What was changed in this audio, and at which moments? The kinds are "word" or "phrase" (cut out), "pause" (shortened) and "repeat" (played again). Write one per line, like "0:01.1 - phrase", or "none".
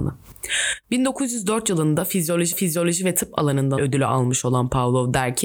0:02.5 - repeat
0:03.8 - word

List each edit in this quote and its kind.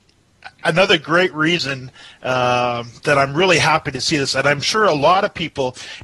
none

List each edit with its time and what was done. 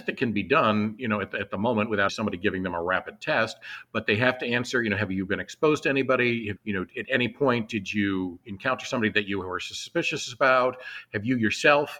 0:02.1 - word
0:06.6 - word

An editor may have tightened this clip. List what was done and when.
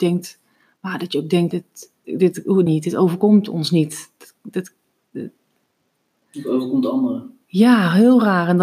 0:01.5 - word
0:02.0 - word
0:02.7 - phrase

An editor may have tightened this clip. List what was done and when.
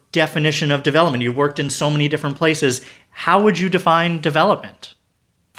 none

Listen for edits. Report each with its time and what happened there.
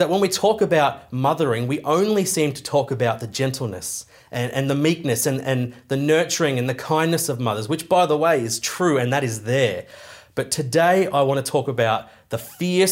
none

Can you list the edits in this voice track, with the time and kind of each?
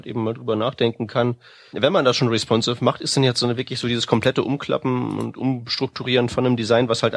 0:01.7 - word

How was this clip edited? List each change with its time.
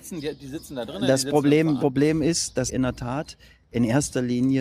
0:01.8 - word
0:02.7 - word

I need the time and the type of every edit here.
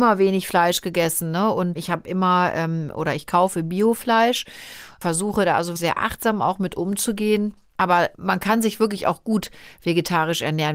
0:01.8 - word
0:05.8 - word
0:08.1 - pause

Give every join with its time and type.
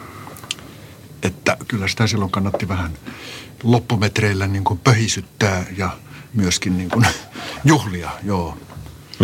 0:01.7 - word

